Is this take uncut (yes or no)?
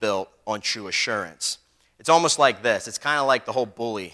yes